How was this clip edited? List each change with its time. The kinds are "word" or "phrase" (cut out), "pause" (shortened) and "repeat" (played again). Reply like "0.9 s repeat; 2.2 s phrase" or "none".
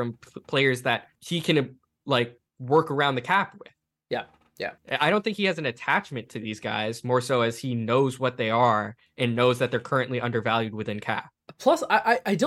1.2 s pause; 4.8 s pause